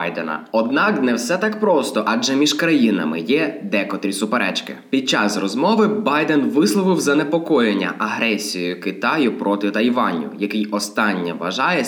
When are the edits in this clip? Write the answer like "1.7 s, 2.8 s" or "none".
none

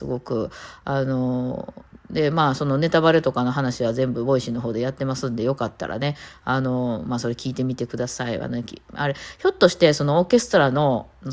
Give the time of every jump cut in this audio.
none

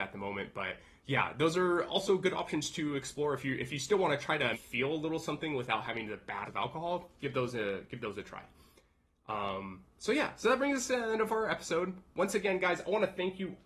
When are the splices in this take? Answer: 4.5 s, 6.5 s

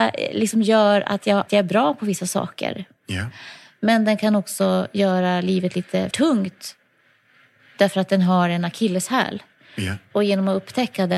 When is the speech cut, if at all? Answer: 1.5 s, 6.1 s

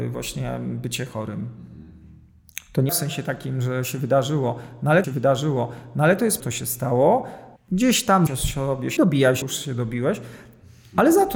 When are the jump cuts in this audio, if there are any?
2.9 s, 5.0 s, 6.4 s, 7.6 s, 8.3 s, 9.0 s, 9.4 s

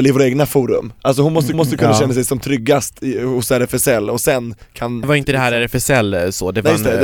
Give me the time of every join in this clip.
1.5 s, 5.0 s

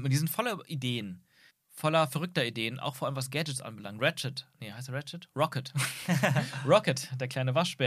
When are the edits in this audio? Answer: 1.5 s

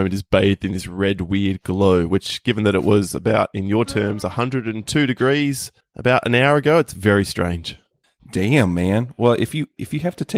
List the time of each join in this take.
5.8 s, 8.0 s

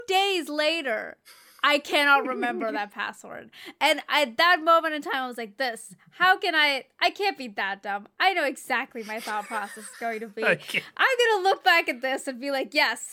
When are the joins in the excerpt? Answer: none

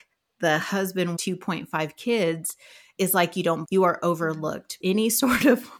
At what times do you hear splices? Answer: 1.2 s, 3.0 s, 3.6 s, 4.8 s

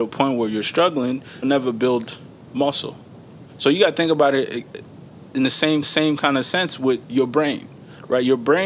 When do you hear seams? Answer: 1.4 s, 3.5 s, 5.8 s

